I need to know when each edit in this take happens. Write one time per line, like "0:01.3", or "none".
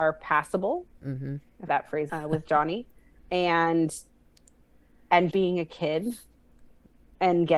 0:00.9
0:01.7
0:02.1
0:03.2
0:05.3